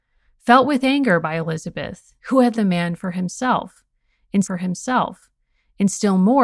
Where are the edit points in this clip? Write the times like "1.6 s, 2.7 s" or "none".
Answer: 2.2 s, 2.5 s, 4.4 s